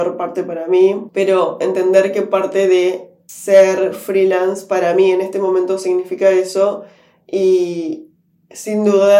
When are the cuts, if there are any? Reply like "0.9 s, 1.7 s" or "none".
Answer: none